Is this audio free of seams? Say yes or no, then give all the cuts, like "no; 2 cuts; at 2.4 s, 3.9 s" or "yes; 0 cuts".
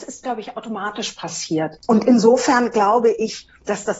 yes; 0 cuts